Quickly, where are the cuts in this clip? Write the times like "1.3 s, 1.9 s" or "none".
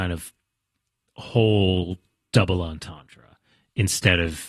none